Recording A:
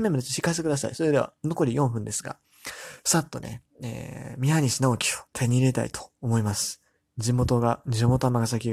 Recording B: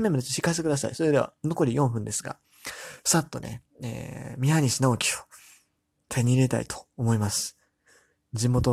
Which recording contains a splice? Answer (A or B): A